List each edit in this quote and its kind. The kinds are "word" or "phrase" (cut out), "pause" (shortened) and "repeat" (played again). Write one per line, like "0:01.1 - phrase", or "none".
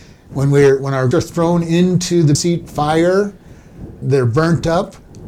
0:01.1 - word
0:02.3 - word
0:04.0 - word